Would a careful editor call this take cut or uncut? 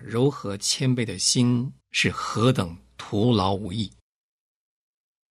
cut